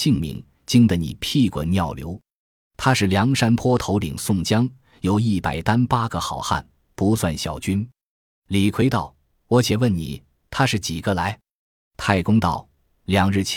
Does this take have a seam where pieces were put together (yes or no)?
no